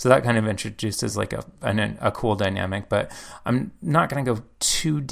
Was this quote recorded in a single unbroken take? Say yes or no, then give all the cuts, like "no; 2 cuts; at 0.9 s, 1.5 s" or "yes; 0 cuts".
yes; 0 cuts